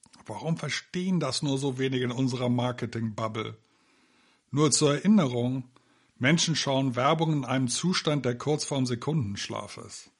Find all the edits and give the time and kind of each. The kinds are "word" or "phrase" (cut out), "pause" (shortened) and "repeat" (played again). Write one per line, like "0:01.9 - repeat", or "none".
none